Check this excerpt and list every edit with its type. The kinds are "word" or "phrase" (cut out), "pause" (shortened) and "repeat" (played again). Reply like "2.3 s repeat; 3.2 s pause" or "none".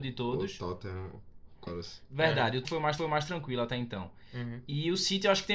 1.7 s word; 2.6 s word; 3.0 s repeat

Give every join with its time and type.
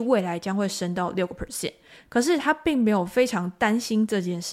none

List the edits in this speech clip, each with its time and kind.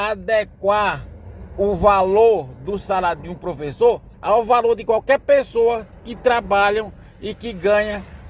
4.1 s pause

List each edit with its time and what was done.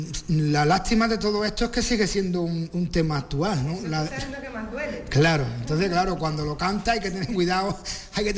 none

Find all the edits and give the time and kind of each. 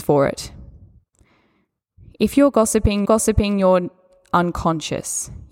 3.0 s repeat

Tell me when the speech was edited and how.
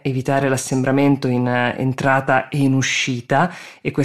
none

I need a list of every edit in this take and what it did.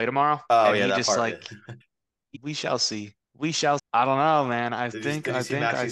1.8 s pause; 2.3 s phrase; 3.2 s pause; 3.8 s word

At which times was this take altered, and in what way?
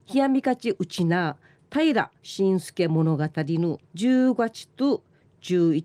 2.2 s pause; 3.9 s pause

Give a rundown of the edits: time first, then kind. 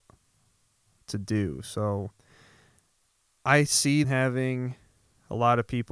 4.0 s phrase

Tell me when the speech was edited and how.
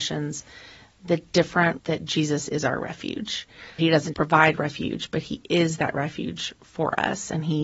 1.8 s word; 3.8 s word; 4.1 s word

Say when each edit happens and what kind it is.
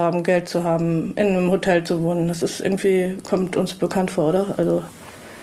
none

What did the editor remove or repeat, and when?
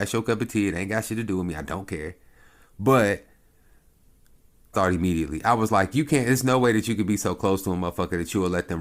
4.7 s phrase

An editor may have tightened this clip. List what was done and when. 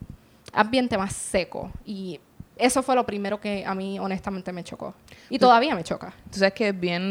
none

